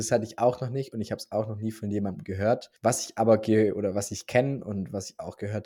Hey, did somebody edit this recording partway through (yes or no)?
yes